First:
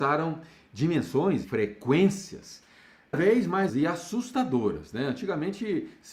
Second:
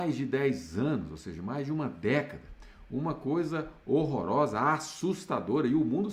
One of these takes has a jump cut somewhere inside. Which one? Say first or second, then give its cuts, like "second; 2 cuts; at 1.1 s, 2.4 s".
first; 3 cuts; at 1.4 s, 3.1 s, 3.7 s